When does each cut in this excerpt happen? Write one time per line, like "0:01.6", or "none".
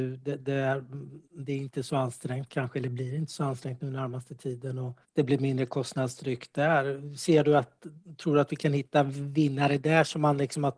0:01.2
0:05.0